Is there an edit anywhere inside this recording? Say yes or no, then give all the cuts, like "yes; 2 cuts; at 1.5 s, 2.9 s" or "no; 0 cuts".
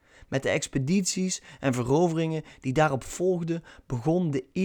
no; 0 cuts